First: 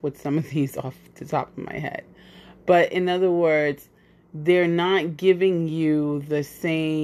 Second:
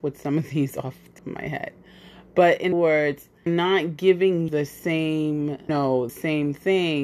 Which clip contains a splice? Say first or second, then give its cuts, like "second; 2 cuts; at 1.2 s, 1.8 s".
second; 6 cuts; at 1.2 s, 2.7 s, 3.5 s, 4.5 s, 5.7 s, 6.1 s